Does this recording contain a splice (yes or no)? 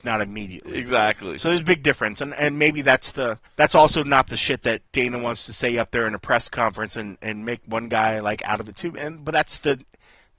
yes